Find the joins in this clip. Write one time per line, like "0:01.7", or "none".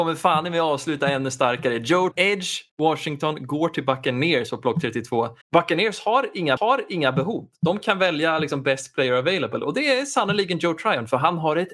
0:02.1
0:02.7
0:05.4
0:06.6